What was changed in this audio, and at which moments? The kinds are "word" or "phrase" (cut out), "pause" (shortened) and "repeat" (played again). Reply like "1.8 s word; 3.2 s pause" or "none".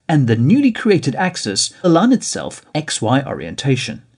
1.8 s word; 2.7 s phrase